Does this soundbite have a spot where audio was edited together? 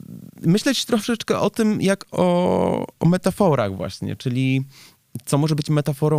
no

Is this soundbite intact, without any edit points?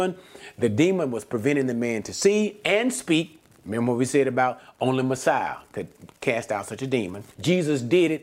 no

